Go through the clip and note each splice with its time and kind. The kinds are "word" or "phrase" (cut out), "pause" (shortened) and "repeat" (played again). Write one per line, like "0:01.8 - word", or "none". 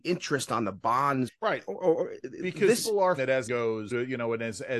0:01.3 - word
0:01.7 - word
0:02.2 - word
0:02.8 - word
0:03.2 - word
0:03.5 - word
0:03.9 - word